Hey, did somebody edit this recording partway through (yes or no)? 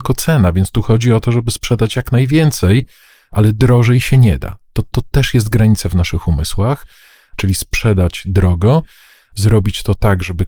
no